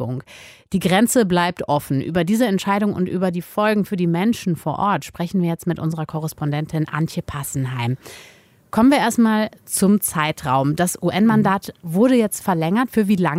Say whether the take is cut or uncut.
uncut